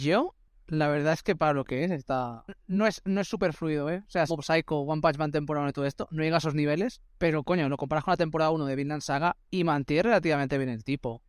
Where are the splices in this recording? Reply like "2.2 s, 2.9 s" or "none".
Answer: 4.3 s, 7.1 s, 9.4 s